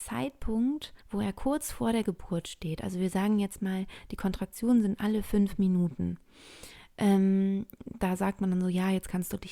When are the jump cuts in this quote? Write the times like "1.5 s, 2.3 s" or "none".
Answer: 1.0 s